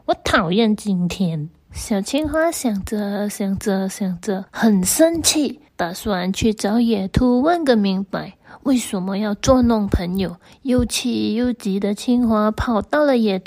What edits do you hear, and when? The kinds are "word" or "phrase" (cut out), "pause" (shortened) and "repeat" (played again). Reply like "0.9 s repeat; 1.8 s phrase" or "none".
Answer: 1.6 s pause; 4.5 s pause; 5.7 s pause